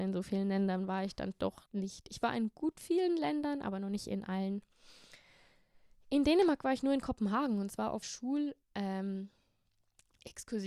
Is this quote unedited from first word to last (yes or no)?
no